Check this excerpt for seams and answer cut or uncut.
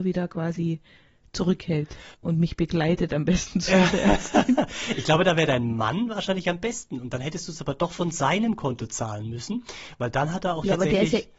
cut